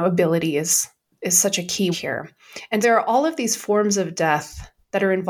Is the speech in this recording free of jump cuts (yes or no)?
no